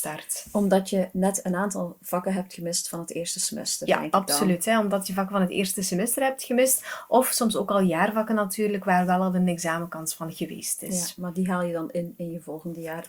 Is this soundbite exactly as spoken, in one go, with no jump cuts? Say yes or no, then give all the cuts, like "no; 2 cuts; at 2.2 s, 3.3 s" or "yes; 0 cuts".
yes; 0 cuts